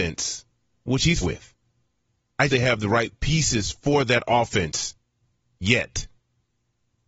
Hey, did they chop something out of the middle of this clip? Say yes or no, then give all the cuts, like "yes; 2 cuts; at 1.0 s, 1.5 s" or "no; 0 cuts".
yes; 2 cuts; at 1.2 s, 2.5 s